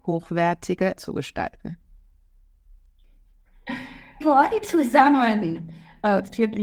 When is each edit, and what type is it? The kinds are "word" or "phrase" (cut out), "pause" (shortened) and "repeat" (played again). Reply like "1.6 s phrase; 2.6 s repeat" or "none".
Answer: 1.0 s word; 4.2 s word